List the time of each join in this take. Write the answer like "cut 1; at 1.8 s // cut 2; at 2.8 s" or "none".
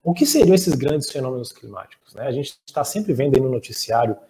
none